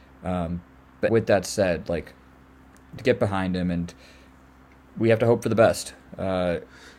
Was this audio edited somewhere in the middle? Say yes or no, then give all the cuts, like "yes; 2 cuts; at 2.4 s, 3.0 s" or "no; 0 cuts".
yes; 2 cuts; at 1.1 s, 3.0 s